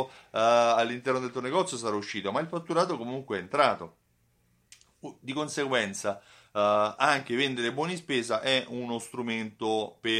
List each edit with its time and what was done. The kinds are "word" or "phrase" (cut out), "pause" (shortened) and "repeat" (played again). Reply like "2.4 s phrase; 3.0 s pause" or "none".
none